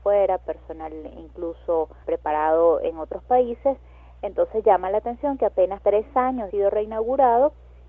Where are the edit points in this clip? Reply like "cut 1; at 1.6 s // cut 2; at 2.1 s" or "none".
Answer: cut 1; at 2.0 s // cut 2; at 5.8 s // cut 3; at 6.5 s